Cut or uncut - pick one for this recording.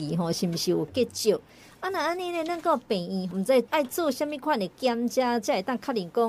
uncut